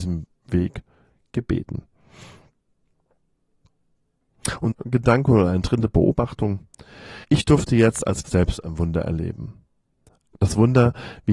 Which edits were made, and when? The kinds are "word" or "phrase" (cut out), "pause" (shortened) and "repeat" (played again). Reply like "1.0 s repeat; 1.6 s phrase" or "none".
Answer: 4.7 s phrase; 7.2 s pause; 8.2 s word